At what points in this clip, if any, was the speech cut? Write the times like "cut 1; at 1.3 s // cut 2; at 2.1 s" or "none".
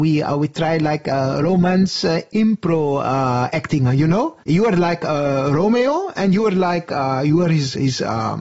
cut 1; at 4.4 s